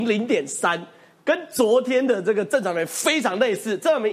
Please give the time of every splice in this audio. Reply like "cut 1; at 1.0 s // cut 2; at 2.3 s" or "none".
none

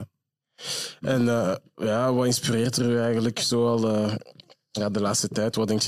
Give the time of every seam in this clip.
none

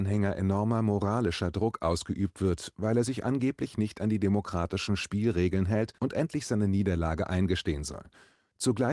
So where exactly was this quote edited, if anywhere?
cut 1; at 6.0 s

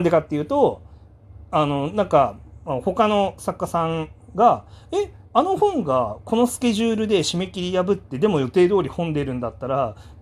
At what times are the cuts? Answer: cut 1; at 5.2 s

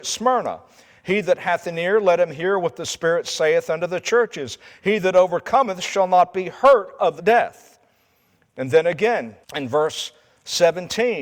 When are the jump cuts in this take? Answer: cut 1; at 7.2 s // cut 2; at 9.4 s

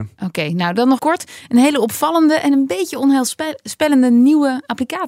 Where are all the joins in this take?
cut 1; at 1.0 s

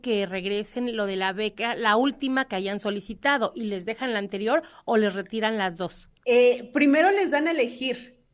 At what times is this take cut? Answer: cut 1; at 6.2 s

